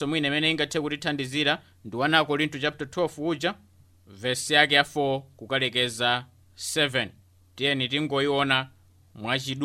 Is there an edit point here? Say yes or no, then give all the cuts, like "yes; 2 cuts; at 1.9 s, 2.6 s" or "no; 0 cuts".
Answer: no; 0 cuts